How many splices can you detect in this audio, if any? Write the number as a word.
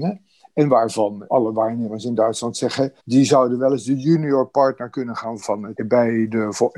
four